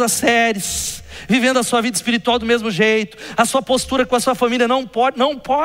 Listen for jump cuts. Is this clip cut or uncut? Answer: uncut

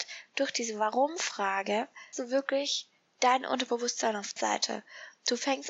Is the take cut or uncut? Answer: cut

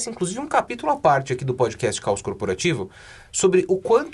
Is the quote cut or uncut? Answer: uncut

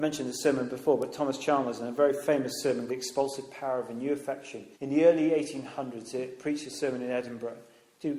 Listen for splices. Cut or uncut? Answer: cut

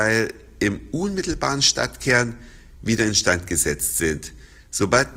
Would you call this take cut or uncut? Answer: uncut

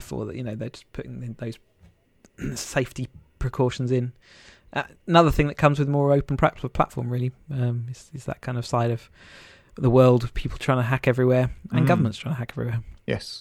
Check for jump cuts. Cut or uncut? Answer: uncut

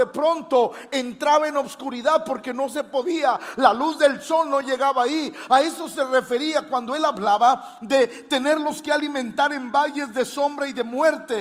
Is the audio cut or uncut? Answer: uncut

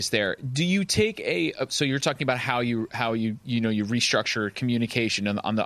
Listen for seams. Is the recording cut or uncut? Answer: uncut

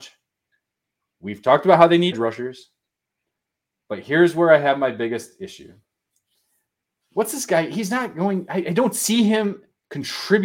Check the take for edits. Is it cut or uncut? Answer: cut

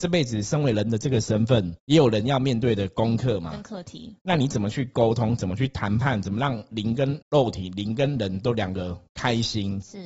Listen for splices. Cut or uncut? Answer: cut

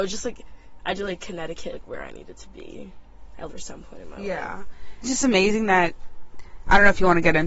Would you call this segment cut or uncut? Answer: cut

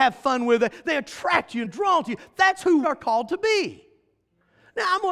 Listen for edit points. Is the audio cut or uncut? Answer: cut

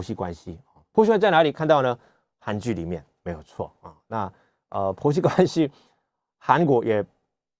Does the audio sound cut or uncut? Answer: uncut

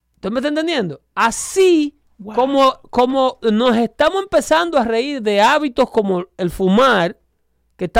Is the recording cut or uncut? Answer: uncut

